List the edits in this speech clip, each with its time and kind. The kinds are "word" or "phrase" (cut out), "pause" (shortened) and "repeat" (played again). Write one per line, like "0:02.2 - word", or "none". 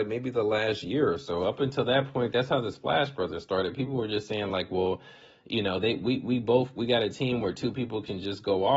none